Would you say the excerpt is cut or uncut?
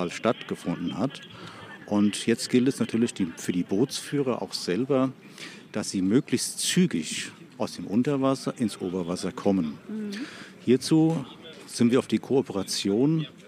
cut